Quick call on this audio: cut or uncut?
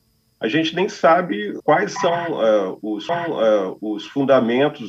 cut